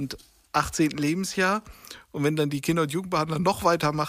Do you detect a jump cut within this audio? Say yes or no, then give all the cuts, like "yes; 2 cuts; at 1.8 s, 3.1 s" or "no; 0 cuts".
no; 0 cuts